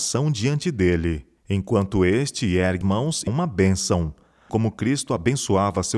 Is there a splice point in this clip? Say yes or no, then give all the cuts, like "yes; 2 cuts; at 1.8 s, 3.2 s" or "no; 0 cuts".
yes; 4 cuts; at 1.4 s, 2.8 s, 3.3 s, 4.5 s